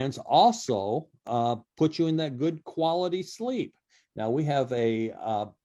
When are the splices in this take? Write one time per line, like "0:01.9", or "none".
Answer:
none